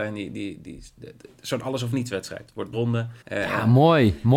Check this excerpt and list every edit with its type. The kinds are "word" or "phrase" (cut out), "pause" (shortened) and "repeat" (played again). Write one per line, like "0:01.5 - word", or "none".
0:02.7 - phrase
0:03.2 - pause